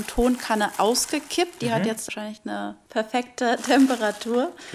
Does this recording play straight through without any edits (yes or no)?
yes